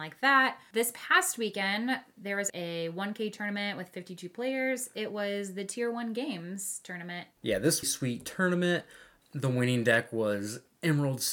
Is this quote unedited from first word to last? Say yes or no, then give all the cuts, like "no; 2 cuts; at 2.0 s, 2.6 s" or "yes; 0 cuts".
no; 3 cuts; at 2.5 s, 7.3 s, 7.8 s